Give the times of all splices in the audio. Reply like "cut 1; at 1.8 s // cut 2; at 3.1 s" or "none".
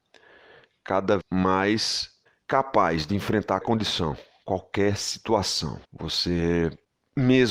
cut 1; at 1.2 s // cut 2; at 3.6 s // cut 3; at 5.8 s